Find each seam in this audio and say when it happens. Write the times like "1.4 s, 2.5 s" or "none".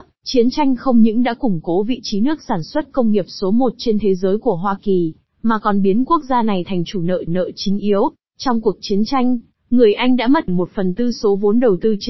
7.3 s, 8.2 s, 10.5 s